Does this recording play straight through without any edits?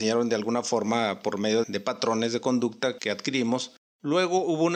no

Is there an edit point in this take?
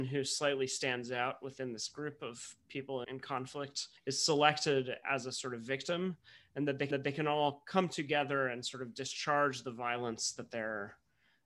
yes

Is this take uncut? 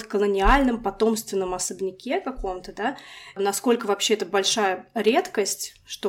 yes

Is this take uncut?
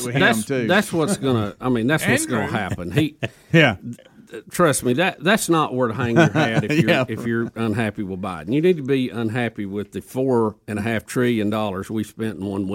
yes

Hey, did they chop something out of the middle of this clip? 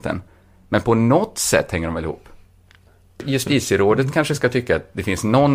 no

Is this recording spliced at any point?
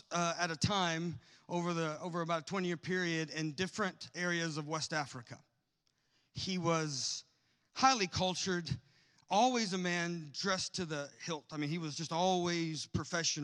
no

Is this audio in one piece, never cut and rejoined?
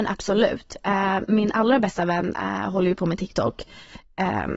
yes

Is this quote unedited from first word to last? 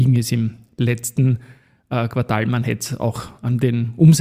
yes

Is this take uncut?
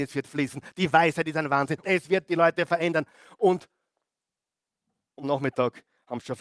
no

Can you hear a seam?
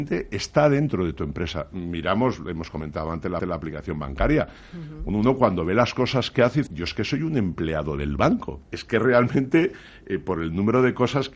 yes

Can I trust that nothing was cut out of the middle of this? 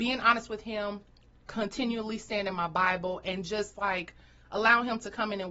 yes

